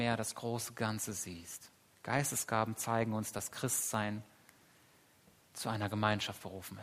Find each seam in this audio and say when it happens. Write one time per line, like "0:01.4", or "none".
0:01.9